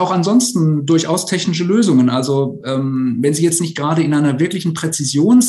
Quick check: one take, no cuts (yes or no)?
yes